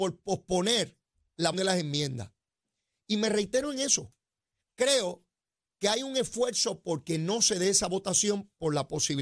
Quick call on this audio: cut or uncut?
cut